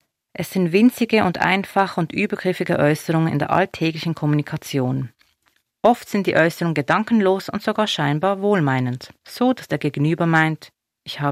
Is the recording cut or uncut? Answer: cut